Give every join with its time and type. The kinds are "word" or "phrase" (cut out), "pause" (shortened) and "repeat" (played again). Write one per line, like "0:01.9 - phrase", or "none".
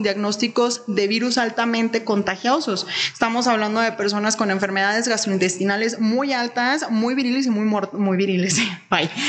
none